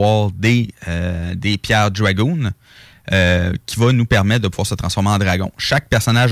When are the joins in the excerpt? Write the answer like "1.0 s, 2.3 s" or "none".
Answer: none